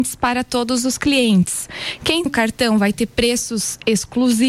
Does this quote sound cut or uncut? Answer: cut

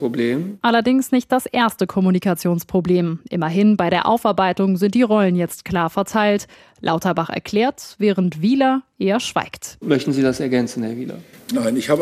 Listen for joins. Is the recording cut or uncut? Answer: uncut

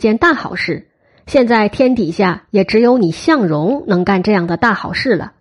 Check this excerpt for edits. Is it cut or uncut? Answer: uncut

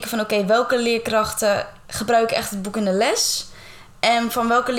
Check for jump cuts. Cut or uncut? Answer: uncut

